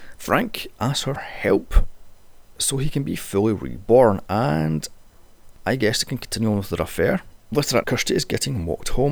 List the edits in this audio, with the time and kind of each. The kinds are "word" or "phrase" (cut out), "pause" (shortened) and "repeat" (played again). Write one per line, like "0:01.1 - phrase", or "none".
0:01.2 - word
0:07.8 - word